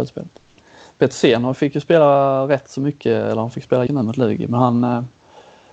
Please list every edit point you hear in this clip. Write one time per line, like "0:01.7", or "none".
0:03.9

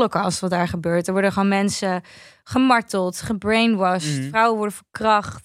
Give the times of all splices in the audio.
none

